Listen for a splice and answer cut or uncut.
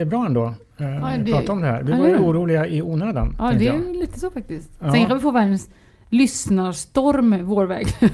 uncut